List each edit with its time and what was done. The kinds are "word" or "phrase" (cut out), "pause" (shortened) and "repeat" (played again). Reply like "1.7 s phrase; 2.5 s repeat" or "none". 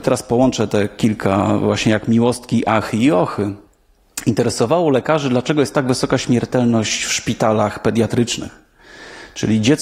none